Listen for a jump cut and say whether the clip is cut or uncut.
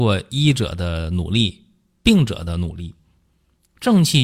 uncut